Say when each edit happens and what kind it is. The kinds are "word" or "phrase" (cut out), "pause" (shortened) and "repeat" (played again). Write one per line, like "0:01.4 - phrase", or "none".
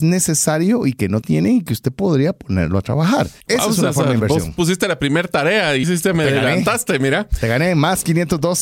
0:01.2 - word
0:03.4 - pause
0:05.8 - word